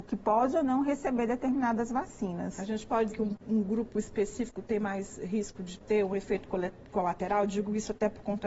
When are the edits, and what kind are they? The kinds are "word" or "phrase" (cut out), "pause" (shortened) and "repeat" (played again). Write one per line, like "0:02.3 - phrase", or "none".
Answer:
0:03.1 - word